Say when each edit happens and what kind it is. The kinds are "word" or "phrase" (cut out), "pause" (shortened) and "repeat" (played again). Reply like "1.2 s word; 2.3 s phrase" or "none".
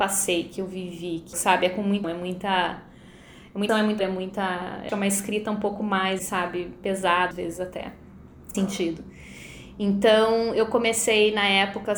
1.3 s word; 2.0 s word; 3.7 s word; 4.0 s word; 4.9 s word; 6.2 s word; 7.3 s word; 8.5 s word